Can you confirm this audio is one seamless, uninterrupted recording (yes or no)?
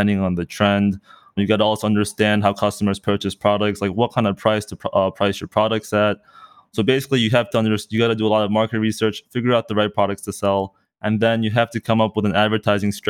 yes